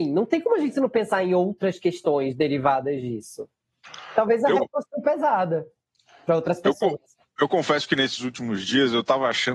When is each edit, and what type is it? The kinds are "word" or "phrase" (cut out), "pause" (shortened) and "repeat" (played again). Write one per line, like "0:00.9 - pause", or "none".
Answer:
0:04.6 - word